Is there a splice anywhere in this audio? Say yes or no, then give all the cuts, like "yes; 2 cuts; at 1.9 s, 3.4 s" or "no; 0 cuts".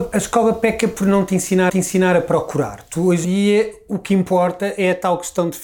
yes; 2 cuts; at 1.7 s, 3.2 s